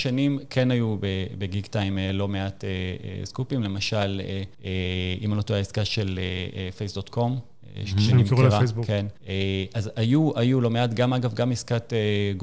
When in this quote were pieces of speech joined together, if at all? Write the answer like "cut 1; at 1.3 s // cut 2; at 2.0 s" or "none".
cut 1; at 4.5 s // cut 2; at 9.2 s